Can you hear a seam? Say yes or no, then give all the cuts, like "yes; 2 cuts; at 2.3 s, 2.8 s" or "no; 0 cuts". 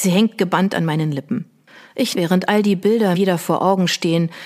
yes; 2 cuts; at 2.1 s, 3.1 s